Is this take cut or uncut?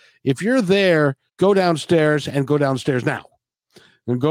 cut